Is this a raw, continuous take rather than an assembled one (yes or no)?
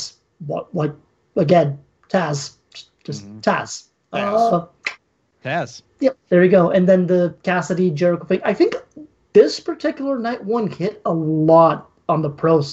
yes